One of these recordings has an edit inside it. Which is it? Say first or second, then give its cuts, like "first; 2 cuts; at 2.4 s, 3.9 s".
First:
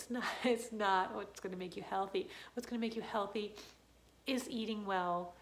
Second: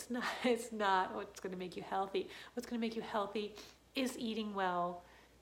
second; 1 cut; at 3.8 s